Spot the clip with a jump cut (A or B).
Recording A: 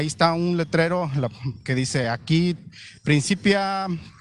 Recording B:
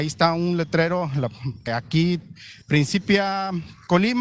B